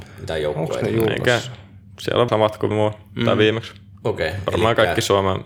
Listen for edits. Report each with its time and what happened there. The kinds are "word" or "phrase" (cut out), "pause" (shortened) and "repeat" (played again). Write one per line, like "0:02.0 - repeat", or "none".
0:02.3 - word
0:02.7 - word